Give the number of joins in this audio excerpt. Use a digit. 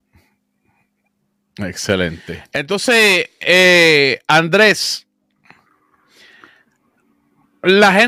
0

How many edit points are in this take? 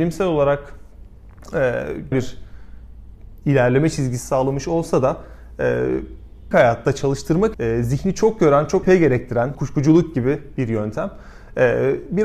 5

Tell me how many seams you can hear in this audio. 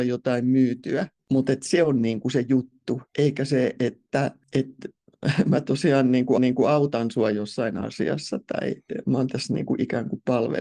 2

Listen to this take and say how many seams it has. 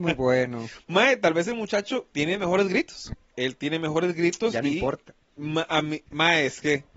1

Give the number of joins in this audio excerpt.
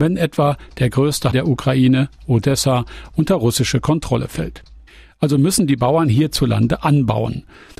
1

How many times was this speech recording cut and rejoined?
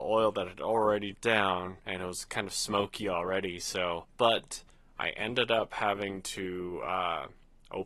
3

